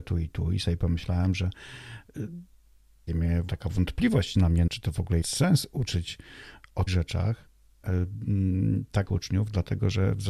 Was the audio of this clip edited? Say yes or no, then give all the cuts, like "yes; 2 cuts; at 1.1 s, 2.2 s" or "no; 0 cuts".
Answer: yes; 6 cuts; at 3.1 s, 3.5 s, 4.7 s, 5.2 s, 6.9 s, 9.1 s